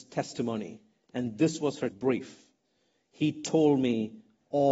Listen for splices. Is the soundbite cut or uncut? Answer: cut